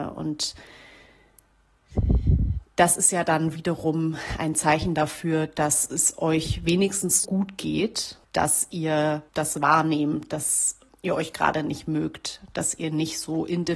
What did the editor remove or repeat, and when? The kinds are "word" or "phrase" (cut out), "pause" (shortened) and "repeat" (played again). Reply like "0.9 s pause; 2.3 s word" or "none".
7.2 s word; 8.2 s pause; 9.3 s pause; 10.9 s pause